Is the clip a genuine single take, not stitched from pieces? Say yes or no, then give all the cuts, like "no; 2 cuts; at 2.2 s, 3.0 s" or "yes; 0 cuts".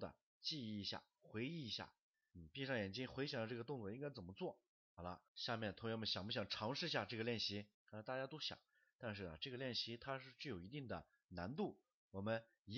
no; 2 cuts; at 5.3 s, 7.7 s